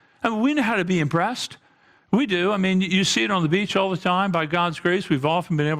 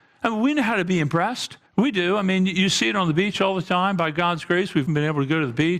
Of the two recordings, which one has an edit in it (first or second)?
second